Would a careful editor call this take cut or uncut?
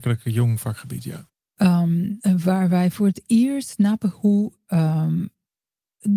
uncut